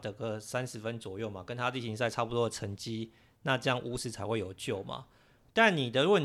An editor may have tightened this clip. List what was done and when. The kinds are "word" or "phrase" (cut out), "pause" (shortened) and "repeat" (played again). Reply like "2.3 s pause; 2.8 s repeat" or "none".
none